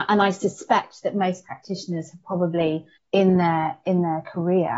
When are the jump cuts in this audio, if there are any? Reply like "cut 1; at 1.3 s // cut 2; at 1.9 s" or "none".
cut 1; at 3.0 s